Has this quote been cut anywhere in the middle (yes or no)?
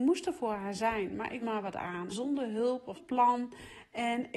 yes